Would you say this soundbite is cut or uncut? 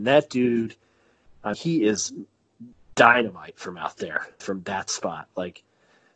cut